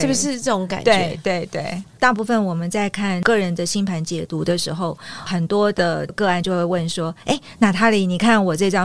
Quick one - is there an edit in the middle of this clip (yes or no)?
yes